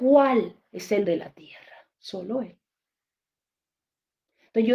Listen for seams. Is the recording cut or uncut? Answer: cut